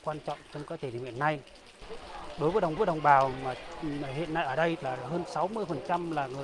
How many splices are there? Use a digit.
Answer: 1